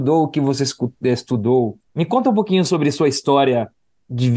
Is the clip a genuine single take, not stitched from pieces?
no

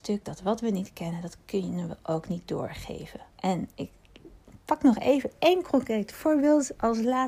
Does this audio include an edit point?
yes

